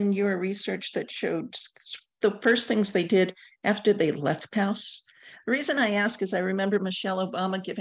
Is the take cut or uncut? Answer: cut